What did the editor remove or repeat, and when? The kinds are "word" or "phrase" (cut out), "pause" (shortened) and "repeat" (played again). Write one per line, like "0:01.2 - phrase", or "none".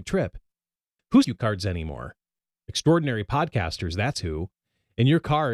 0:01.2 - phrase